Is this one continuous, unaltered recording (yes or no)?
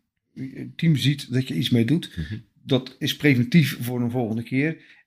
yes